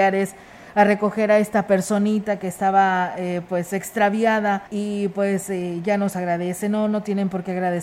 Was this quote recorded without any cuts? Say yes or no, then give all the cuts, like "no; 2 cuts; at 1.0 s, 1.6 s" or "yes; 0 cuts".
no; 1 cut; at 4.7 s